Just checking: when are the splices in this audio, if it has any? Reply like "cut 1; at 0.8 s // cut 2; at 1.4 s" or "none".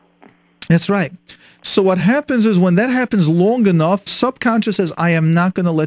cut 1; at 4.1 s